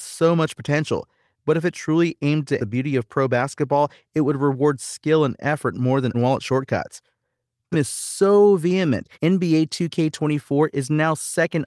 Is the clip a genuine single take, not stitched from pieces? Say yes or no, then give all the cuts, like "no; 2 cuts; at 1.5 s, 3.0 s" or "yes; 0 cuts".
no; 4 cuts; at 2.6 s, 6.1 s, 7.7 s, 9.1 s